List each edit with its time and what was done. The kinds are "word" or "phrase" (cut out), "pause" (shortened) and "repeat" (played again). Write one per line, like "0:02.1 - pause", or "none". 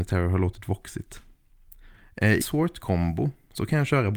0:02.4 - word